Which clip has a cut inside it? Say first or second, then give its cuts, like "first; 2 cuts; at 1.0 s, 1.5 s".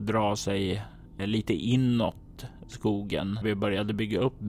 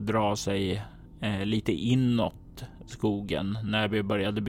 first; 2 cuts; at 1.2 s, 3.4 s